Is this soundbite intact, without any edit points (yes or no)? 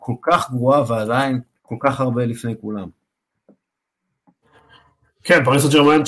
no